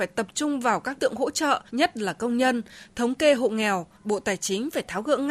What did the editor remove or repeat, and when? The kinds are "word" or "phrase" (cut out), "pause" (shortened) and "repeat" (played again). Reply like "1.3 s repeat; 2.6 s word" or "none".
1.0 s word; 1.7 s pause; 3.9 s pause